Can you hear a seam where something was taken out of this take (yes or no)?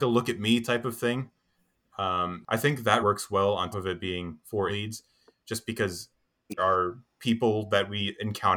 yes